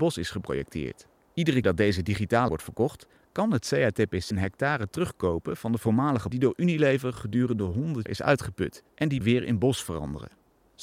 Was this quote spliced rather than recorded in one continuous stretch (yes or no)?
yes